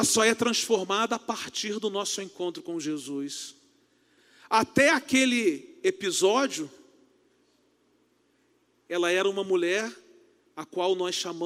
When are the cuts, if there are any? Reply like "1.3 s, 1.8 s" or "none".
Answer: none